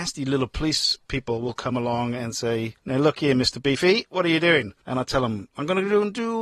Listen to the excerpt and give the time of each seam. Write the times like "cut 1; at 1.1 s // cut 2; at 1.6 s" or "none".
none